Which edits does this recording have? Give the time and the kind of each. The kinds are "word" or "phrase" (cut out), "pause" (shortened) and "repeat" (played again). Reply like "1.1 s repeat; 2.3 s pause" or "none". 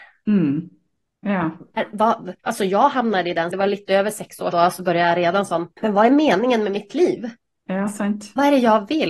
2.4 s pause; 3.5 s word; 4.5 s word; 5.7 s pause